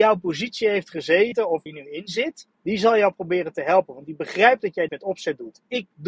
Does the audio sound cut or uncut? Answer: cut